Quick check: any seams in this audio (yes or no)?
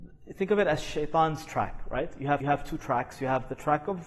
yes